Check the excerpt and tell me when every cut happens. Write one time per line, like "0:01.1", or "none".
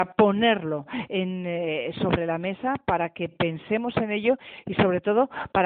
none

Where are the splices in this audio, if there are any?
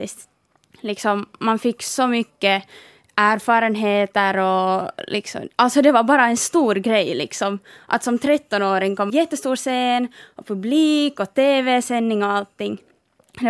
0:09.1

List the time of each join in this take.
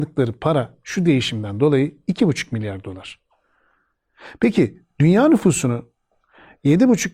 none

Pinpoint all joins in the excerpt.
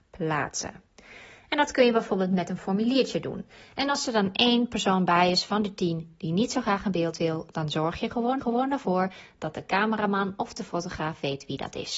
0:08.4

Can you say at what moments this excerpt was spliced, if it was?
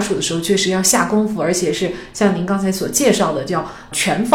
none

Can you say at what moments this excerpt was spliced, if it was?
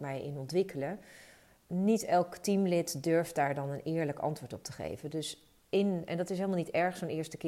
none

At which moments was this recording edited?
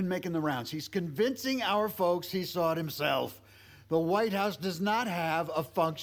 none

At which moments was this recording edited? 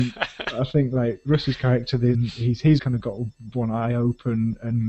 0:02.1
0:02.8

